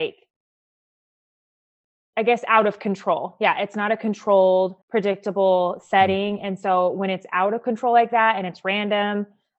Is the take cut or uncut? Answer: cut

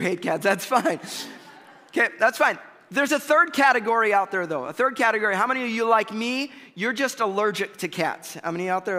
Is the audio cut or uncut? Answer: uncut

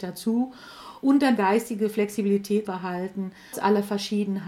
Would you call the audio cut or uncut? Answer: cut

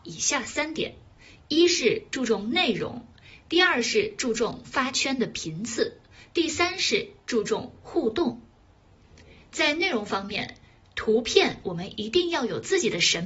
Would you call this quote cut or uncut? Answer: uncut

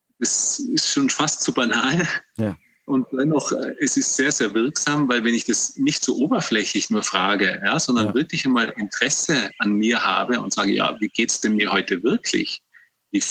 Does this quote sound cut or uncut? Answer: uncut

